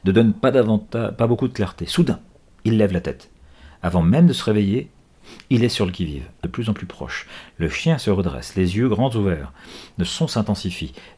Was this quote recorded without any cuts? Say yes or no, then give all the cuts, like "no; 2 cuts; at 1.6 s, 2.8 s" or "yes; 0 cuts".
no; 1 cut; at 6.4 s